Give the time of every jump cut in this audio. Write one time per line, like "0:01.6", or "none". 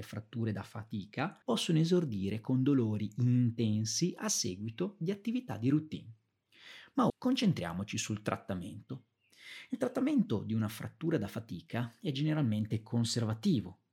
0:01.4
0:07.1